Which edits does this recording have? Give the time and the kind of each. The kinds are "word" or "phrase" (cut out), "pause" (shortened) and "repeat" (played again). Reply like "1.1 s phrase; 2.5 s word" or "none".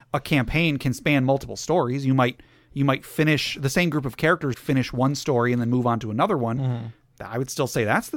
4.5 s word